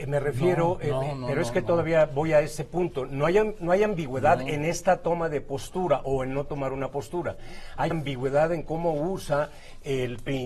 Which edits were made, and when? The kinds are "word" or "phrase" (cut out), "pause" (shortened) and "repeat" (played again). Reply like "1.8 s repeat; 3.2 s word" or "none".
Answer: 7.9 s word